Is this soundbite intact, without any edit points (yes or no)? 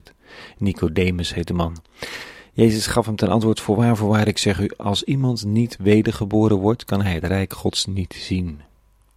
yes